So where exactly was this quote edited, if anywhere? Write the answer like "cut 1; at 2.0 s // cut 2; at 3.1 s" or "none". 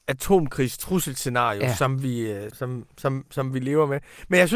cut 1; at 2.5 s